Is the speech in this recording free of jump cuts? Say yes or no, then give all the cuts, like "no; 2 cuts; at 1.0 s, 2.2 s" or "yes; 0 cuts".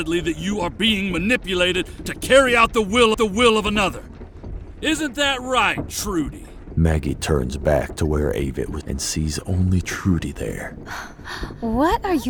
no; 2 cuts; at 3.1 s, 8.8 s